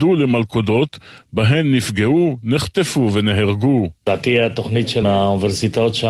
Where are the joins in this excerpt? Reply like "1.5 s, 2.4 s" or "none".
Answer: 5.0 s